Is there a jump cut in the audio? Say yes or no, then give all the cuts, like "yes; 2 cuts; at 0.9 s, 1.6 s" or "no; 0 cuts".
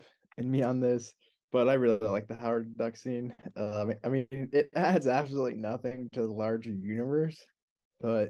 no; 0 cuts